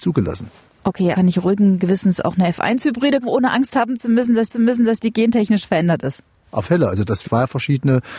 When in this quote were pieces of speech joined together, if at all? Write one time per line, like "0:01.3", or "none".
0:01.1
0:03.2
0:04.5
0:06.6
0:07.2